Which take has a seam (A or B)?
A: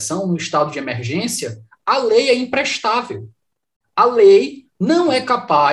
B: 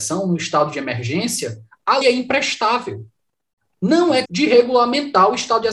B